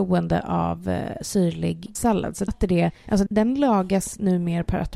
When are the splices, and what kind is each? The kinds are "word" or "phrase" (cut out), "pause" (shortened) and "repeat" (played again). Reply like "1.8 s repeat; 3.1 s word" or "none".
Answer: 2.0 s word; 2.5 s word; 3.3 s word